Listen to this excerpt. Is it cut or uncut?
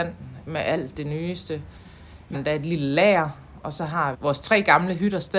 cut